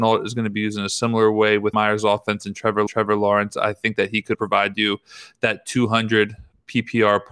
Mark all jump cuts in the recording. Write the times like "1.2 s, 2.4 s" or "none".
1.7 s, 2.9 s, 4.3 s